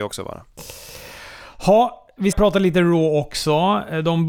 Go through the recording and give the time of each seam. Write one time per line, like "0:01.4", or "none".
0:02.3